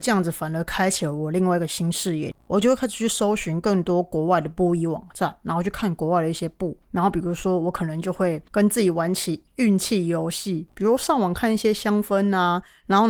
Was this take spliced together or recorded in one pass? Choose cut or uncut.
cut